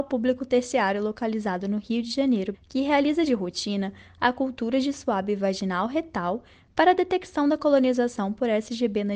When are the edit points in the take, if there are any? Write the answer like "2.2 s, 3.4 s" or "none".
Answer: 2.5 s